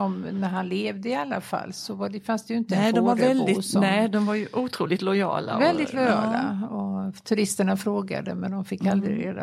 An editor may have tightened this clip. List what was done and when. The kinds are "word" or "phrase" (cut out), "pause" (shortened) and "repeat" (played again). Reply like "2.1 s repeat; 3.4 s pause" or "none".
none